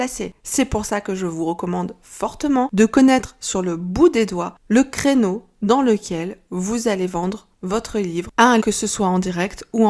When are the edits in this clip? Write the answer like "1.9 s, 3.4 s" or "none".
7.5 s, 8.6 s